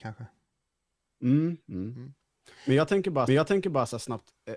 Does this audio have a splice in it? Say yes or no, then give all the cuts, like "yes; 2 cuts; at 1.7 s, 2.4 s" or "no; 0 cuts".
yes; 1 cut; at 3.3 s